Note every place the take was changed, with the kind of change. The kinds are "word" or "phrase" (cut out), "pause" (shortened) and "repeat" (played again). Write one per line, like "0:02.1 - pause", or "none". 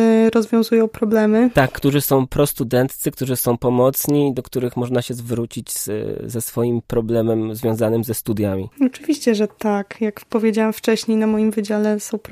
none